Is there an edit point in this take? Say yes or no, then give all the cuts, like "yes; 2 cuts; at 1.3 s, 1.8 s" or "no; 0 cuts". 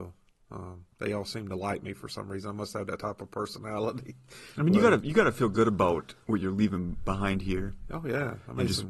yes; 1 cut; at 0.9 s